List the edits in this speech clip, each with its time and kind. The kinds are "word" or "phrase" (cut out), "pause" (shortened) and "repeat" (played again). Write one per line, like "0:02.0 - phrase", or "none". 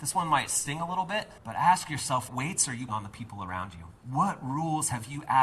0:01.4 - pause
0:02.3 - word
0:02.9 - word
0:04.0 - pause